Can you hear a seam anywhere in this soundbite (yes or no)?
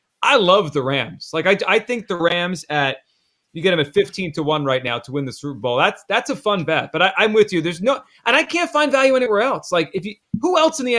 no